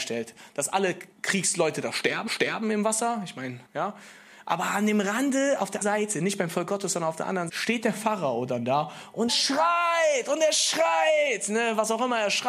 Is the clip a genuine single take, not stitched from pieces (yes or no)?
no